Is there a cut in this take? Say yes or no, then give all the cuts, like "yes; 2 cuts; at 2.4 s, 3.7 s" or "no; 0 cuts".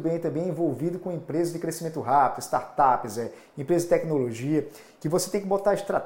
no; 0 cuts